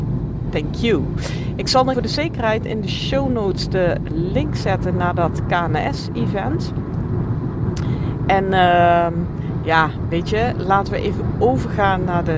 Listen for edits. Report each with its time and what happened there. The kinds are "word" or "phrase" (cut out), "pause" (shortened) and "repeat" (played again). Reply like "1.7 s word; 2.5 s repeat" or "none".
1.9 s word